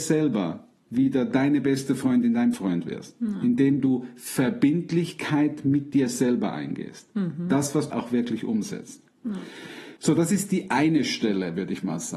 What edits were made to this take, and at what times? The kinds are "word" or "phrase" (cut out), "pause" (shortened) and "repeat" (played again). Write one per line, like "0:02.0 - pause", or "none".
0:02.5 - word
0:07.9 - phrase
0:10.0 - pause